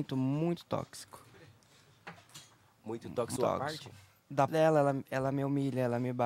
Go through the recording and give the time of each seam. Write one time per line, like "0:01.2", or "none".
0:03.4
0:04.5